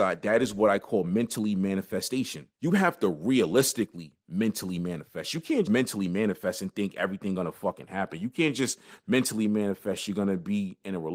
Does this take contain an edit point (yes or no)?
yes